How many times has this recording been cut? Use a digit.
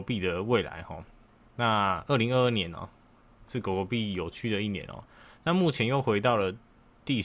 0